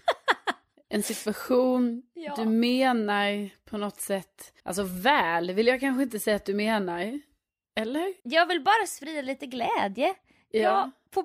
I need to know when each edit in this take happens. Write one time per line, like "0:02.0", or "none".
0:04.6
0:08.2